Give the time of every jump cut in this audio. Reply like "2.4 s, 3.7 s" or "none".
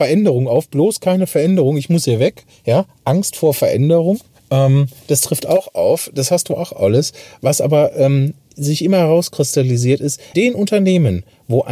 4.3 s, 10.3 s